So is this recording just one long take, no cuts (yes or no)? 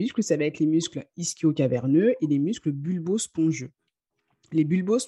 yes